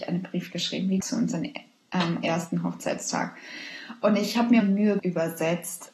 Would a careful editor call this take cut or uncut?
cut